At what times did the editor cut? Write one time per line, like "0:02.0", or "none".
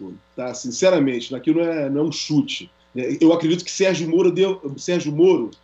0:02.8